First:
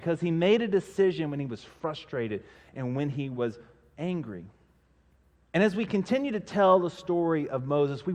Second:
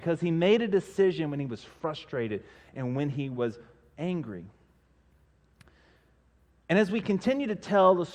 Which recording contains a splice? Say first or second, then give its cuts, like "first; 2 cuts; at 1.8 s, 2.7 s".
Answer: first; 1 cut; at 5.2 s